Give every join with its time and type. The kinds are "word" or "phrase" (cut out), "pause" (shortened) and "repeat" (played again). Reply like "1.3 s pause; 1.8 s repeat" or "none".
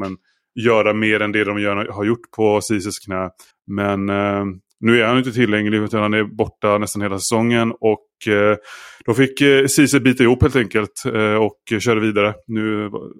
3.5 s pause